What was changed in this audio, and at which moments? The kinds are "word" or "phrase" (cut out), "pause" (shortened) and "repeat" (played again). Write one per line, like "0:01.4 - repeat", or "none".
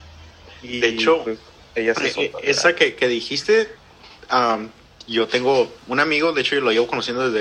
0:05.8 - pause

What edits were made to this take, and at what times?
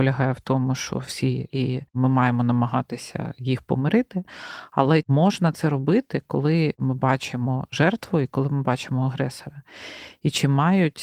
0:01.5 - phrase
0:05.0 - word

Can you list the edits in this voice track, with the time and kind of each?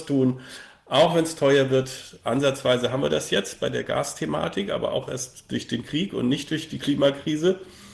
none

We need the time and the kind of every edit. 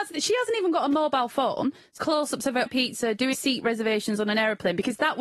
0:02.0 - word
0:02.7 - word
0:03.3 - word

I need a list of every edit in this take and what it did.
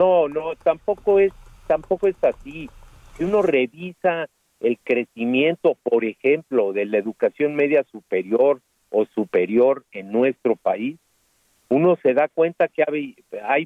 none

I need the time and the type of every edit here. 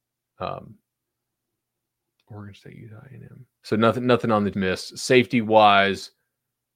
0:03.5 - pause
0:04.5 - word

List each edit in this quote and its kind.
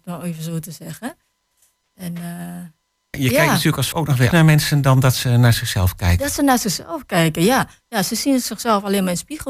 0:03.1 - word
0:03.9 - word
0:04.3 - word

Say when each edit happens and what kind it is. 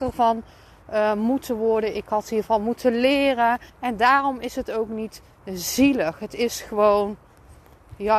0:03.7 - pause

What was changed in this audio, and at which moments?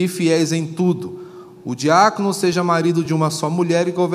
none

